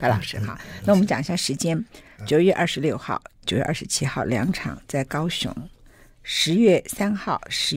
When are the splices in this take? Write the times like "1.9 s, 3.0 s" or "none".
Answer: none